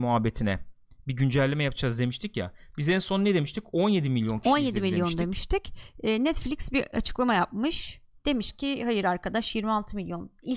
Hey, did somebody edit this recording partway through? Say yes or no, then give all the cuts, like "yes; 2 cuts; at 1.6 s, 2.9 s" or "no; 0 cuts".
no; 0 cuts